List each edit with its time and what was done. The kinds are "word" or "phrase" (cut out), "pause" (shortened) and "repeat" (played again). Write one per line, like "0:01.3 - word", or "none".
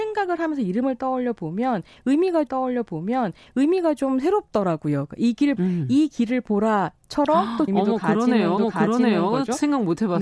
0:02.5 - repeat
0:05.6 - word
0:07.7 - word
0:08.6 - repeat